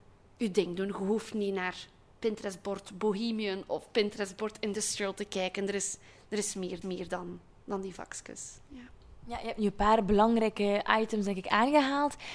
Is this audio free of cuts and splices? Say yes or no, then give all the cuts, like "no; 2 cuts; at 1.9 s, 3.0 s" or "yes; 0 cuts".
no; 1 cut; at 6.8 s